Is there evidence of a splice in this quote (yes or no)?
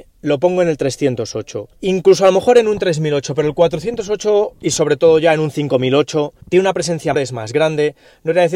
yes